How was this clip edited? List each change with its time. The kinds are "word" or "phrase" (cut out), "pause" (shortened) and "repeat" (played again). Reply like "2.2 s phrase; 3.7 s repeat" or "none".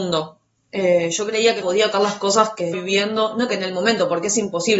1.6 s word; 1.9 s word; 2.7 s word; 3.5 s word